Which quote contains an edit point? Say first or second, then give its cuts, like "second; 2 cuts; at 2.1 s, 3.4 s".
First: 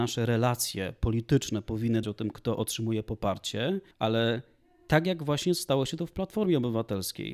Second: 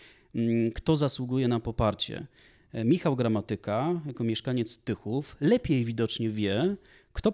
first; 2 cuts; at 2.0 s, 3.9 s